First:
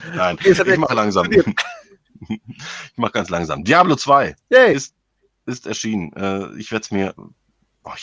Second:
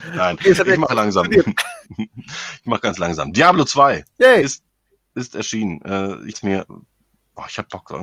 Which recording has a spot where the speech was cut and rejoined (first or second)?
second